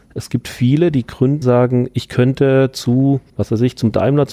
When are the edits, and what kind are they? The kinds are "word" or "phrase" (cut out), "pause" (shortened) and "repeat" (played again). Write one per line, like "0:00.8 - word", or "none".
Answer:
0:01.4 - word
0:03.3 - pause